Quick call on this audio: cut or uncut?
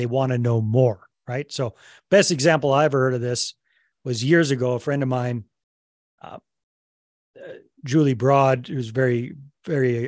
uncut